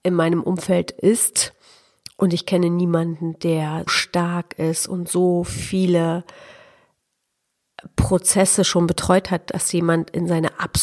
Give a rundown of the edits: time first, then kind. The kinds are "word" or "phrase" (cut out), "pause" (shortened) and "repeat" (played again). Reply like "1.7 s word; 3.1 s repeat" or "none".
3.9 s word